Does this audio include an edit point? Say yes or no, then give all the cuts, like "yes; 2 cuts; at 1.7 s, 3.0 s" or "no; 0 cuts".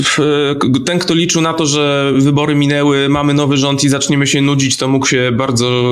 no; 0 cuts